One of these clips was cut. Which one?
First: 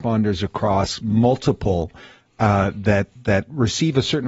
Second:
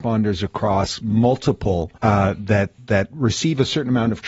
second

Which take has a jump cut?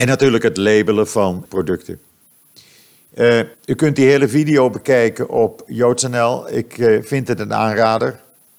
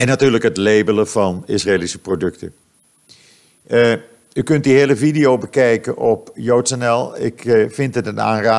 first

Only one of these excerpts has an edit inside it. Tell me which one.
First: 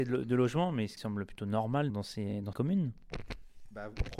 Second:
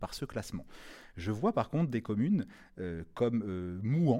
first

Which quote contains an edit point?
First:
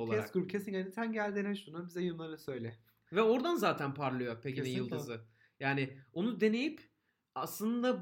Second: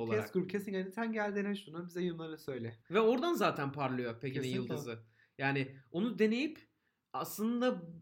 second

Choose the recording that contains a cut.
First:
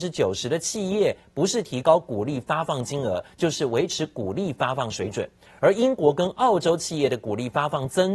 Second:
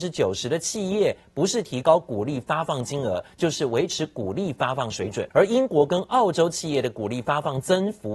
second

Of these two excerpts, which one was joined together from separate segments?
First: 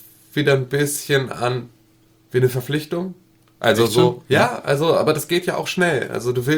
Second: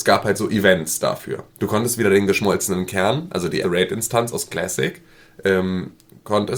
second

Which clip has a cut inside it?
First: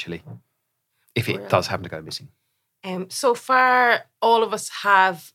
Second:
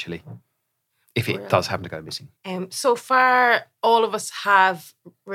second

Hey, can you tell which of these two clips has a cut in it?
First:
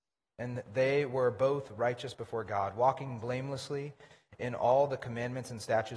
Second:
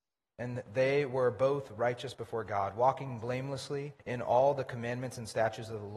second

